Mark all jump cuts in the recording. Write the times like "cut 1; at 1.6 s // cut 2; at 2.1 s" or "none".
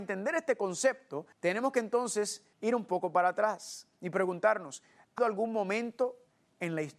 cut 1; at 1.3 s // cut 2; at 2.5 s // cut 3; at 5.2 s